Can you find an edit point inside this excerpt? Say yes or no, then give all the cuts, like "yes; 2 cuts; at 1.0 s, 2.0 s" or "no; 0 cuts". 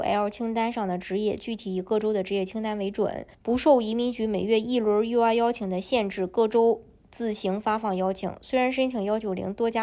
yes; 1 cut; at 3.3 s